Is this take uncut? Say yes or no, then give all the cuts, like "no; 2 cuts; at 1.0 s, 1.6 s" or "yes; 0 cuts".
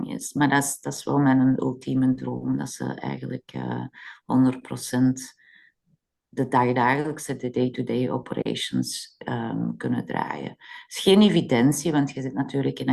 yes; 0 cuts